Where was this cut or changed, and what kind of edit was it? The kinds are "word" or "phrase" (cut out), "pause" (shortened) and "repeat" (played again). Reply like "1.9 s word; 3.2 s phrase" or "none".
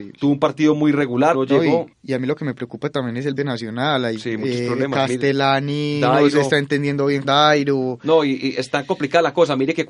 1.3 s word; 1.9 s pause; 3.4 s phrase; 7.2 s word